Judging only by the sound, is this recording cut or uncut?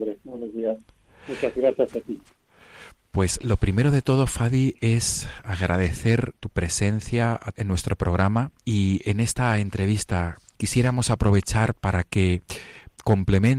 uncut